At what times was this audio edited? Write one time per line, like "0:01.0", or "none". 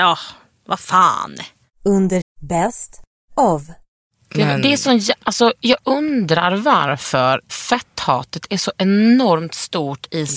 0:02.2
0:07.5